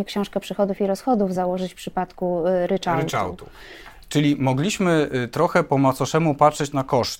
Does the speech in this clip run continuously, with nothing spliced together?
yes; 0 cuts

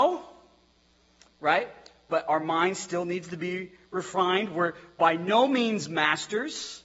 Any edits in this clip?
no; 0 cuts

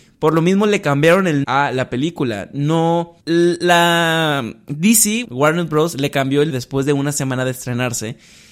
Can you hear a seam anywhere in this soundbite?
yes; 4 cuts; at 1.4 s, 3.2 s, 5.2 s, 6.5 s

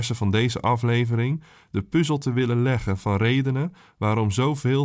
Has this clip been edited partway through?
no; 0 cuts

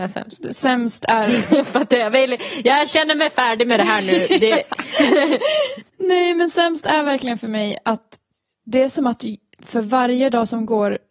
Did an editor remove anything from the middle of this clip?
no; 0 cuts

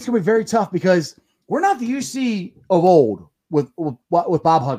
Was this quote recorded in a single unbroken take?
yes; 0 cuts

